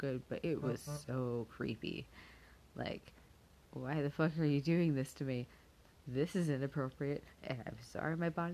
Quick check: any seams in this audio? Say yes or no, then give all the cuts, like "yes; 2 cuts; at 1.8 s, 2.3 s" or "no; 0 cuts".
no; 0 cuts